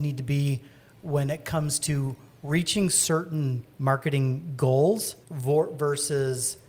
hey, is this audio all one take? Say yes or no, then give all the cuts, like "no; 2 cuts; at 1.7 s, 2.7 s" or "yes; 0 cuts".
no; 2 cuts; at 3.7 s, 5.2 s